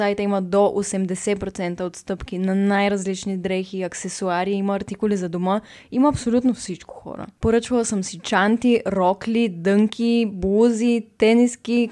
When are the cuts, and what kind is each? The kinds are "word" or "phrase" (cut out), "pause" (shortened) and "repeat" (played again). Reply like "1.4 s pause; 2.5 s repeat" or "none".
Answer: none